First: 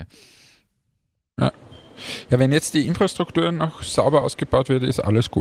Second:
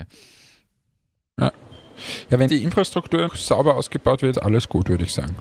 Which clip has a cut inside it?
second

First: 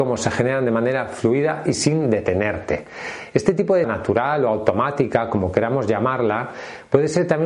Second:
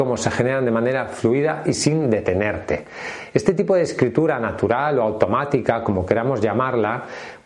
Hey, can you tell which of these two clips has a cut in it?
first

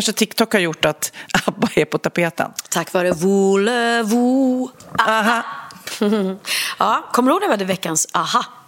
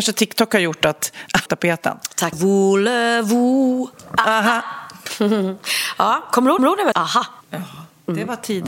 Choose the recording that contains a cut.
second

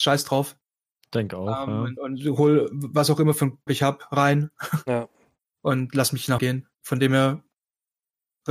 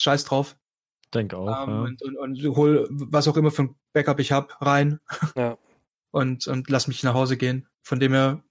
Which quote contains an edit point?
first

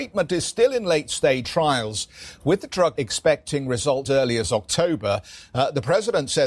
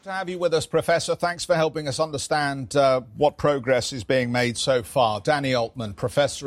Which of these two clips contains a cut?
first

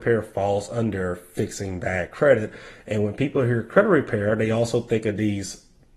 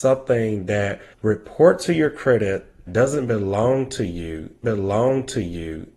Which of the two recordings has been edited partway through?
second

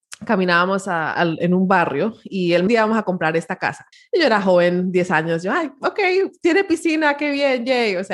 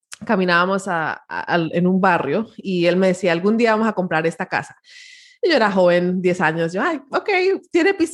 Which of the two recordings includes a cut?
first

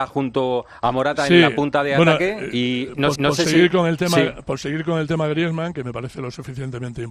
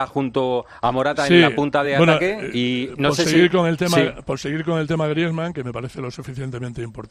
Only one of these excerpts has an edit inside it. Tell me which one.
first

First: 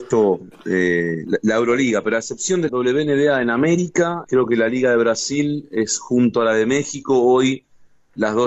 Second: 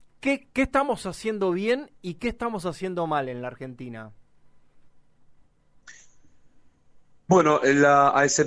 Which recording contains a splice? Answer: first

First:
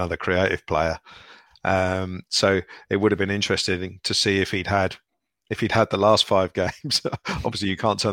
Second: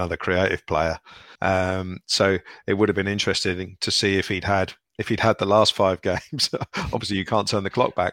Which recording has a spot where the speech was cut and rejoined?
second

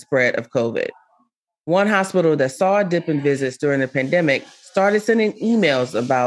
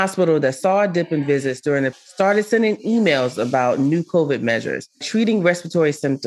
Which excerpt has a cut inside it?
second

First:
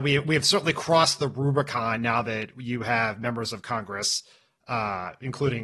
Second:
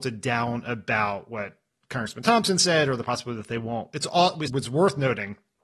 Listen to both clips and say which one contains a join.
second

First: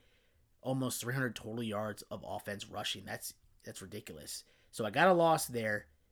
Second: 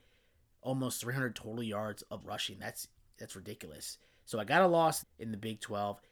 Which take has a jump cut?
second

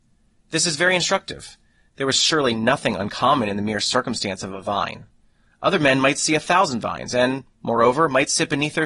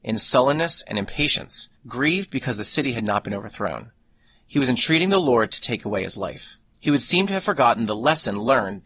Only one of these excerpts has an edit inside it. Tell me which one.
second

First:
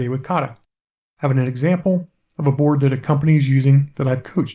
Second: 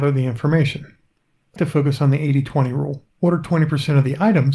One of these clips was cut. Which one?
second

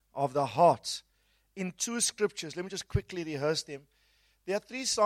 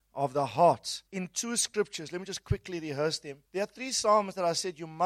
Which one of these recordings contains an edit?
second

